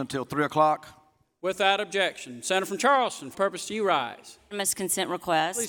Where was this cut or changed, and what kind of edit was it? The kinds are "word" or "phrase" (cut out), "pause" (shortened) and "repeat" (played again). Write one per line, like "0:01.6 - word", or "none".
0:03.3 - word